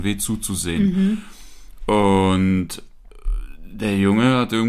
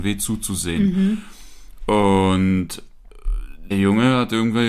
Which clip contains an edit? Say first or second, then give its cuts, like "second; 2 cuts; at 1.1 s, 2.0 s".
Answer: second; 1 cut; at 3.7 s